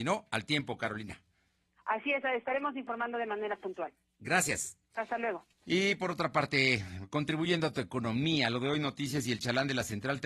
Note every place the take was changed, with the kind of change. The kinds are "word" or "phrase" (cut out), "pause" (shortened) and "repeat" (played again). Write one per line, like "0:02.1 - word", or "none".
0:04.8 - pause
0:05.5 - pause

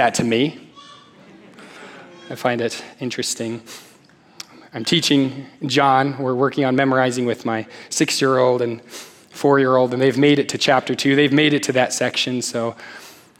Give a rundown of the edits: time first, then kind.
none

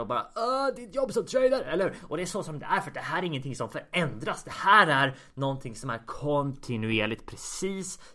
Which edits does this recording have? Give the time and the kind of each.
none

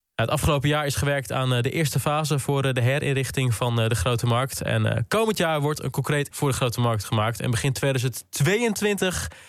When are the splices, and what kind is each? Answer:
0:06.3 - word

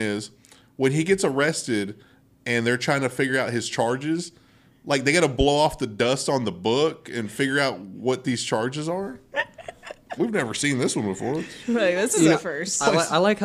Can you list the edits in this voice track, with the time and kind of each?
0:10.2 - word

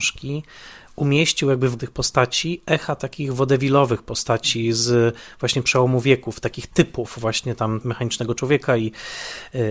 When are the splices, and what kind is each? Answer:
0:01.8 - word
0:07.8 - word

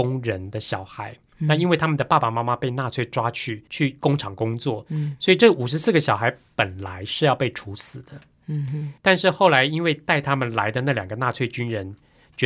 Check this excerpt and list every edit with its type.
0:03.7 - pause
0:09.0 - pause

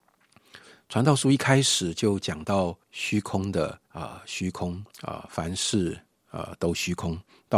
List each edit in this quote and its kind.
0:02.8 - pause
0:03.9 - pause
0:04.9 - pause

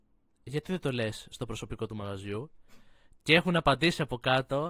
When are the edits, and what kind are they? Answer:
none

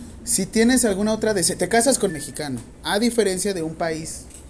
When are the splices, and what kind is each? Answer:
0:02.1 - phrase

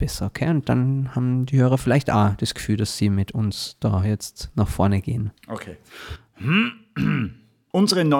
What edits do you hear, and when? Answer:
0:05.4 - pause

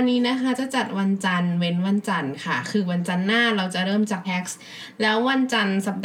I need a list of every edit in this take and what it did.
0:04.2 - word

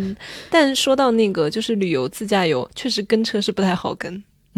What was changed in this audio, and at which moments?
0:02.7 - pause

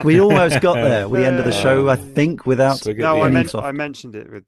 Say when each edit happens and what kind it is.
0:01.1 - phrase
0:03.5 - word

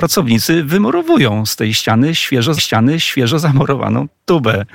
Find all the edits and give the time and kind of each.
0:02.6 - repeat

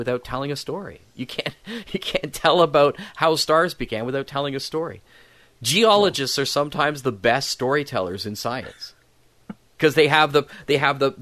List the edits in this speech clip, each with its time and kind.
none

